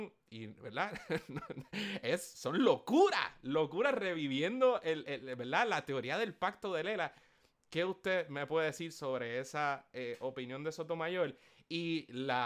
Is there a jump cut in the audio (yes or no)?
no